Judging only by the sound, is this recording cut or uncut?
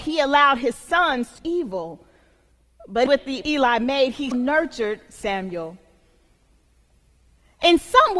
cut